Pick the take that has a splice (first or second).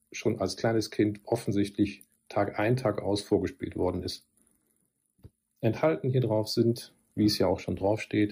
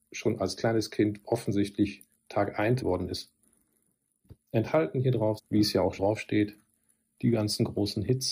second